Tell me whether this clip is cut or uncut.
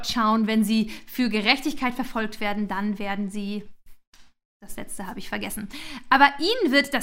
uncut